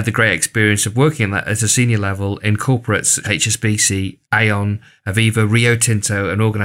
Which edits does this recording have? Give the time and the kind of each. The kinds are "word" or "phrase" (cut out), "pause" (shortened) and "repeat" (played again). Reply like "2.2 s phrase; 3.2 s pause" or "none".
3.2 s word; 4.2 s pause